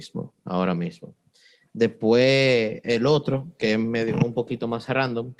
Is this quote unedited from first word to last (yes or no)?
yes